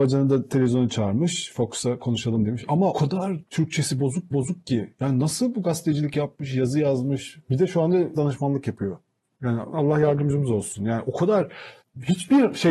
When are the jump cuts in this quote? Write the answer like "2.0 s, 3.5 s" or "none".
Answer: 2.9 s, 4.3 s, 8.1 s, 9.7 s, 11.8 s